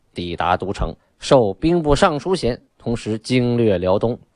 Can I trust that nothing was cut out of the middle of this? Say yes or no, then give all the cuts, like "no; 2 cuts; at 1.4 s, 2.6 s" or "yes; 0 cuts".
no; 2 cuts; at 1.0 s, 2.7 s